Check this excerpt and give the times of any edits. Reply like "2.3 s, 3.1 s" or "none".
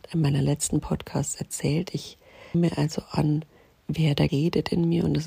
2.5 s, 4.3 s